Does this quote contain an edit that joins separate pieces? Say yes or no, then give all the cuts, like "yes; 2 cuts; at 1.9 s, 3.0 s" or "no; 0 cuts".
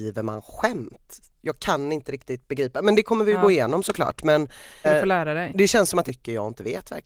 yes; 2 cuts; at 4.8 s, 6.1 s